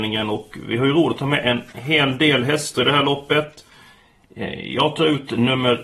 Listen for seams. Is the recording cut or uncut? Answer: uncut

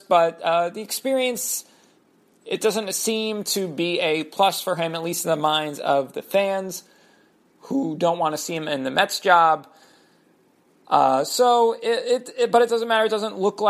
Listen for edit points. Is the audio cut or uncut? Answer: uncut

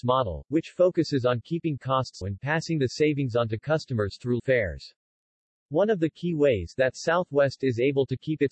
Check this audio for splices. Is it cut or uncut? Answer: cut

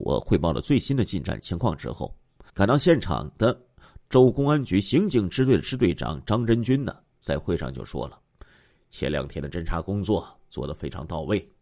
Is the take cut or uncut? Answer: cut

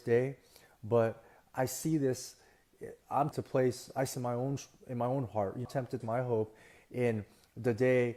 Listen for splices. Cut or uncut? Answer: cut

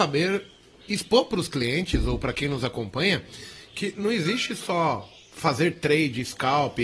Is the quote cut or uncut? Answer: uncut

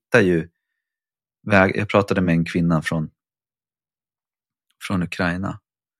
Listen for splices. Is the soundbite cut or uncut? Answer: uncut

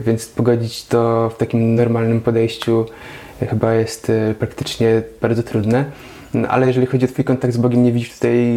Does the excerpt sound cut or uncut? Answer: uncut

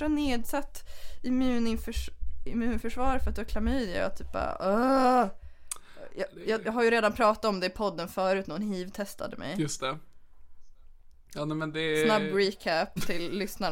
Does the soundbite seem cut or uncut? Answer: uncut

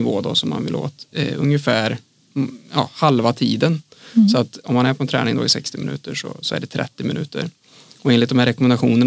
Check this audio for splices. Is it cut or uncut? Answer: uncut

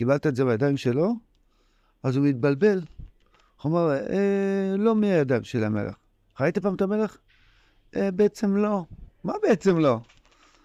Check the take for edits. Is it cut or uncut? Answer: uncut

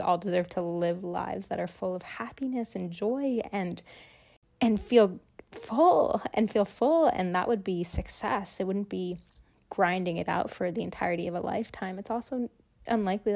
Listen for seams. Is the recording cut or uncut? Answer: uncut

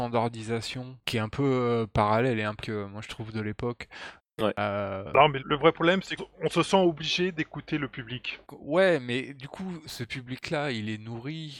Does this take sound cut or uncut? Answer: cut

